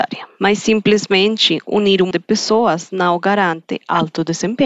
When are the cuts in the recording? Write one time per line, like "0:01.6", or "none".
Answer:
0:02.1